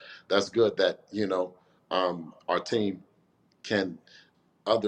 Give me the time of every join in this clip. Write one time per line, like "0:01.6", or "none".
none

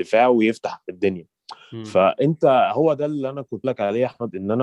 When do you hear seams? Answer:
0:03.6

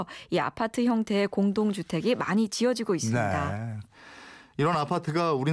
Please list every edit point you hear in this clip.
none

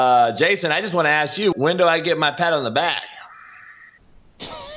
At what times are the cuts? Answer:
0:01.5

